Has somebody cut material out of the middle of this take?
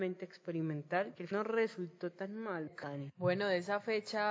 yes; 2 cuts; at 1.3 s, 2.8 s

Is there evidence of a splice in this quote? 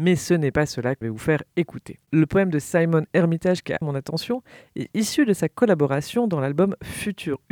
yes; 2 cuts; at 1.0 s, 3.8 s

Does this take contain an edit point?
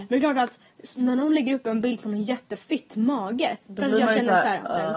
no; 0 cuts

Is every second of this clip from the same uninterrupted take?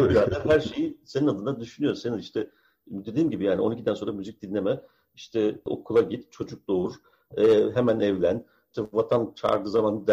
yes; 0 cuts

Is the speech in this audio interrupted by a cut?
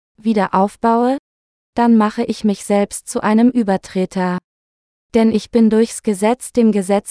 no; 0 cuts

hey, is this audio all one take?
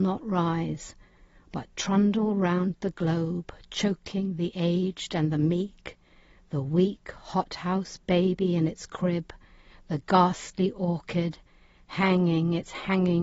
yes; 0 cuts

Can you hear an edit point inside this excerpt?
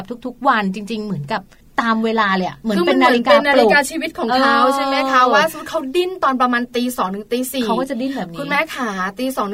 yes; 1 cut; at 1.6 s

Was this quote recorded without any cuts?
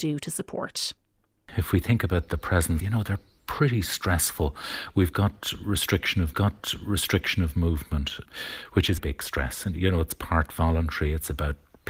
no; 3 cuts; at 2.8 s, 6.3 s, 9.0 s

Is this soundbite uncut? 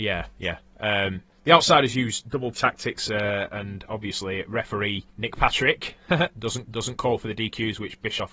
no; 4 cuts; at 1.3 s, 2.5 s, 5.1 s, 6.6 s

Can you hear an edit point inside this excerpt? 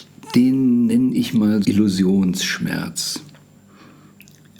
yes; 1 cut; at 1.6 s

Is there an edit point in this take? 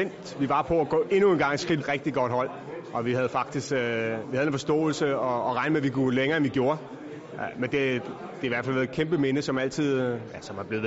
yes; 1 cut; at 1.8 s

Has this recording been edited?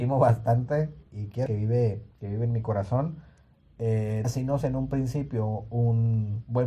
yes; 5 cuts; at 1.1 s, 1.5 s, 2.1 s, 4.2 s, 4.6 s

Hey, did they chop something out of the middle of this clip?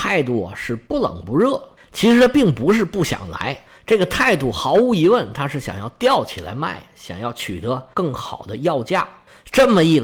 no; 0 cuts

